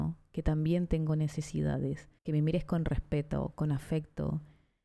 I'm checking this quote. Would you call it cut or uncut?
cut